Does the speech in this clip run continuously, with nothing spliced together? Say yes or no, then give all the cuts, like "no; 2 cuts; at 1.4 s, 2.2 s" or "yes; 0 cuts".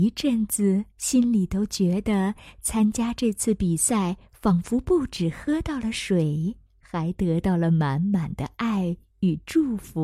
no; 2 cuts; at 0.9 s, 6.7 s